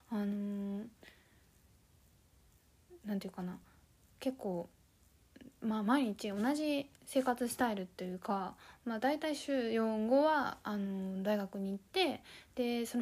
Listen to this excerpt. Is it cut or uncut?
uncut